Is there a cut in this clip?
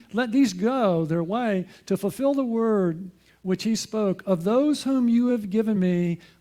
no; 0 cuts

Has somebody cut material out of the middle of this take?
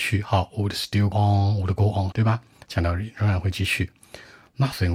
yes; 2 cuts; at 1.1 s, 2.1 s

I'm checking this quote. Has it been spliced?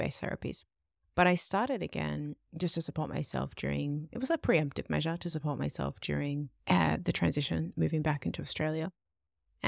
yes; 1 cut; at 6.6 s

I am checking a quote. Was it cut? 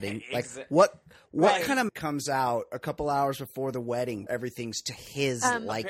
yes; 3 cuts; at 1.3 s, 1.9 s, 4.3 s

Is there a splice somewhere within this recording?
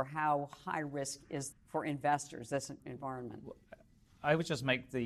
yes; 2 cuts; at 1.5 s, 2.8 s

